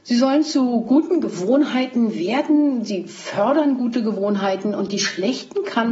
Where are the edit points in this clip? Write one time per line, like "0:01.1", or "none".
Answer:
none